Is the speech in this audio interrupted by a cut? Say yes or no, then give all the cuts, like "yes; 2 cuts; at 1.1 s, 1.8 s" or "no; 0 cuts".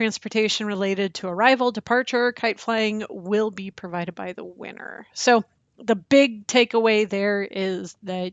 no; 0 cuts